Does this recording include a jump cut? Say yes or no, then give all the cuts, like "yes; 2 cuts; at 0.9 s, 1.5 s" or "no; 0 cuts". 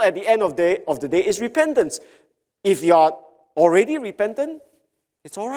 no; 0 cuts